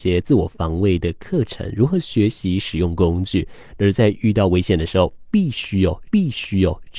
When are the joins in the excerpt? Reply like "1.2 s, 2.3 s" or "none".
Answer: 6.1 s